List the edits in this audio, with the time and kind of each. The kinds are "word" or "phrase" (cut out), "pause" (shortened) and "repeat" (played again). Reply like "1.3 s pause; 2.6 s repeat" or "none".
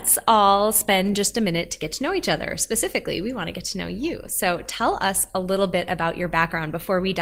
none

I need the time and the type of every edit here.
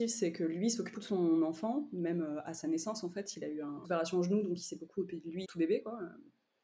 0.9 s word; 3.8 s phrase; 5.4 s word

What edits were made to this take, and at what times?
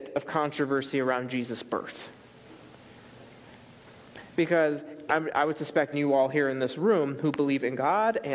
5.1 s word; 5.9 s word

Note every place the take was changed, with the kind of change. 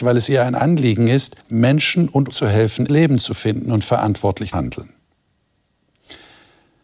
1.4 s pause; 2.3 s word; 2.9 s word; 4.5 s word

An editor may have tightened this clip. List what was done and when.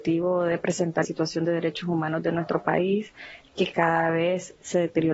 1.0 s phrase

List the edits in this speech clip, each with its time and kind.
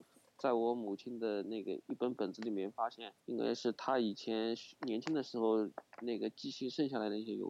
3.2 s pause

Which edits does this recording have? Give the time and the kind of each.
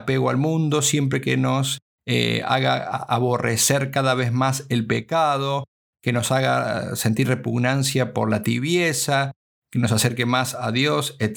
none

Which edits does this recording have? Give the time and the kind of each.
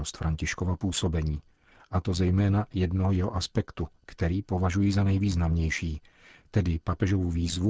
none

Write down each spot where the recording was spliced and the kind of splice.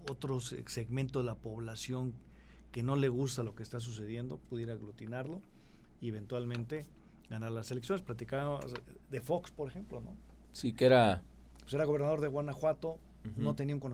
none

